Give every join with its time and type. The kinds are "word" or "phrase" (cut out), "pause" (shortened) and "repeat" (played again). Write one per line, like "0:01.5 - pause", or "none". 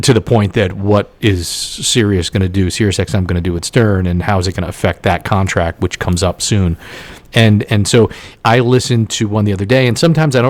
none